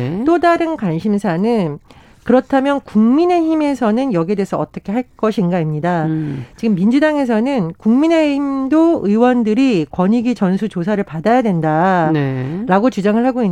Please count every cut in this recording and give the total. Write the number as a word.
zero